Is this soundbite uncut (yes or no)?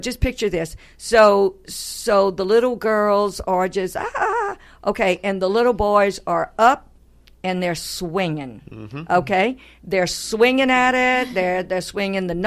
yes